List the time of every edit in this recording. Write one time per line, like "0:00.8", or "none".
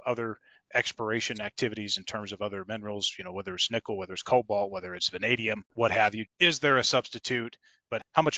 0:05.7
0:06.3